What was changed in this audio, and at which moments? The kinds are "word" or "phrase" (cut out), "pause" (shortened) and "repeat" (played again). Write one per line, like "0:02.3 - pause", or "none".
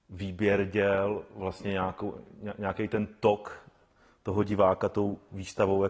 none